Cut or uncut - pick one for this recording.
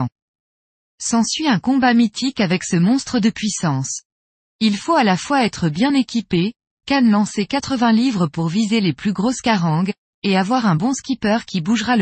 uncut